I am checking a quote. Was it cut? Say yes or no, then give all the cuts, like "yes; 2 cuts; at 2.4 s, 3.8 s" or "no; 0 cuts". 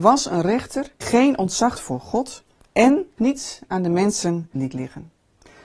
yes; 4 cuts; at 1.0 s, 1.8 s, 3.2 s, 4.6 s